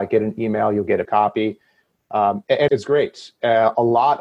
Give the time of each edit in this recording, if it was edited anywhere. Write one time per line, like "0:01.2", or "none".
0:01.0
0:02.7